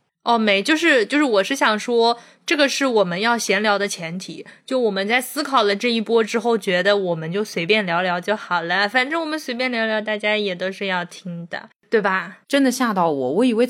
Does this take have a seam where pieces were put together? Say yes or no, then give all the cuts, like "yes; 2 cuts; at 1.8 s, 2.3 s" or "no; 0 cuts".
yes; 1 cut; at 12.4 s